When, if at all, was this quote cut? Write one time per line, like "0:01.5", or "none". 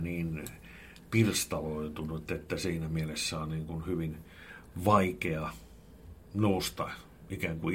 none